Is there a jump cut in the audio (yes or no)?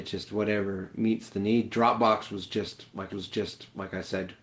yes